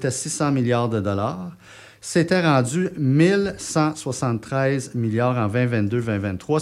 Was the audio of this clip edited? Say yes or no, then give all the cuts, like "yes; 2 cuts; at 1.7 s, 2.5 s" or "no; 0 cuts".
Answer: no; 0 cuts